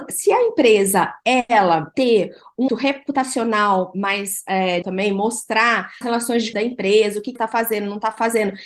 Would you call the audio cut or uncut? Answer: cut